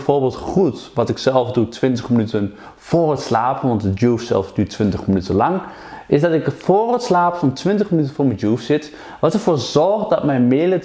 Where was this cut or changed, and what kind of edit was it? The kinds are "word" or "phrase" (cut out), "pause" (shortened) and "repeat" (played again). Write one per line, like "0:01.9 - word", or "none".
none